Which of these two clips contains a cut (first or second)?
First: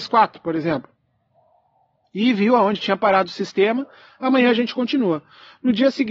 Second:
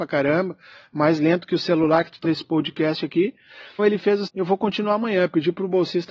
second